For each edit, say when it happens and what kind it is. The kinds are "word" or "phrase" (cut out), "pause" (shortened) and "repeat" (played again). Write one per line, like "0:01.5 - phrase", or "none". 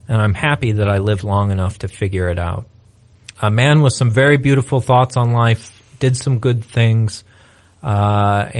0:03.3 - pause